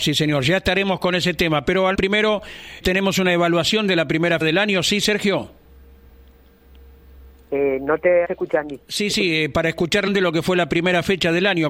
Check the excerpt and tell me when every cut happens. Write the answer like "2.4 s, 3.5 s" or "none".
1.9 s, 2.8 s, 4.4 s, 8.2 s, 10.1 s